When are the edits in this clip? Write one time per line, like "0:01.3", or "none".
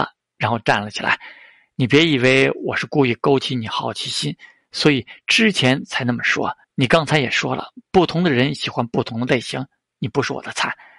0:06.6